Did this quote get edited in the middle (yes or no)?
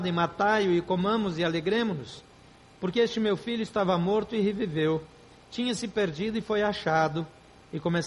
no